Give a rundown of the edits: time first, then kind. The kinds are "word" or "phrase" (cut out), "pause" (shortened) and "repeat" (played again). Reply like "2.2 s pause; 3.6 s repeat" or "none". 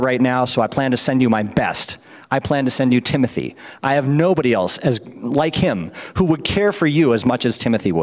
none